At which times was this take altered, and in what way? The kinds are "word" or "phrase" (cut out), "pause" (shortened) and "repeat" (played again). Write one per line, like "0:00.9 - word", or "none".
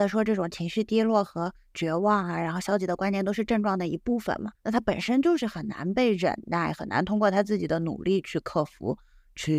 0:04.5 - pause